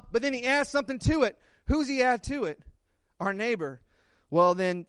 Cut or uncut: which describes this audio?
uncut